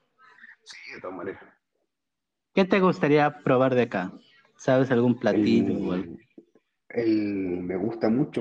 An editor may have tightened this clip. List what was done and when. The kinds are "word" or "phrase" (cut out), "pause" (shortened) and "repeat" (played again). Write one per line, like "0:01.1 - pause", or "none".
none